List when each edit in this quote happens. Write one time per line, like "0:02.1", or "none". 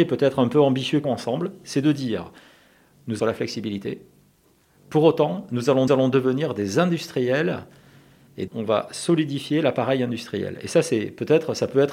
0:01.0
0:03.2
0:05.9
0:08.5